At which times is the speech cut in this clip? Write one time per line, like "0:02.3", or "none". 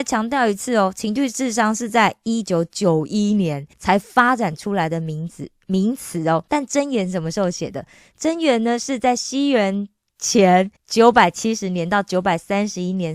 0:03.7
0:06.5
0:10.8